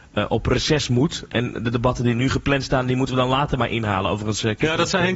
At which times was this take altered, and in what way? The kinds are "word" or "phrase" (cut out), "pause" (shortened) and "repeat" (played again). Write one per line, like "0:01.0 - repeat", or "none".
none